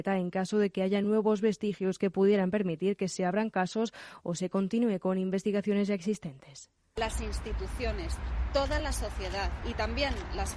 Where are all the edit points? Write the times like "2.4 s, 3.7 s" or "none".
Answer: none